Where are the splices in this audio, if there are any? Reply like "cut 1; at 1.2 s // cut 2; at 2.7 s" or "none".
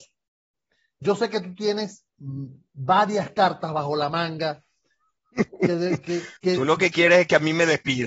cut 1; at 2.1 s // cut 2; at 6.4 s